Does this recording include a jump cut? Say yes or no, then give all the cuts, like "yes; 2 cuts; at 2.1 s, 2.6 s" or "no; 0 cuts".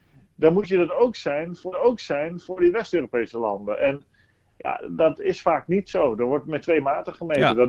yes; 2 cuts; at 1.7 s, 4.8 s